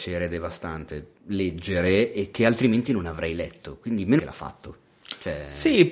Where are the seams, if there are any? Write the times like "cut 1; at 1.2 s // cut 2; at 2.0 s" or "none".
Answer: cut 1; at 1.2 s // cut 2; at 4.2 s